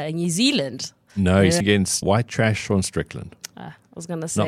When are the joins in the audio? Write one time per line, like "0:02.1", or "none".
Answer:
0:01.6
0:02.0